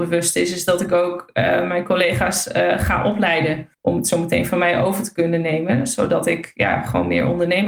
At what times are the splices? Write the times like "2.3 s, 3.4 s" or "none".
3.7 s